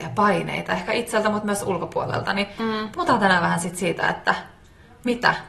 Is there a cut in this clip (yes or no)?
no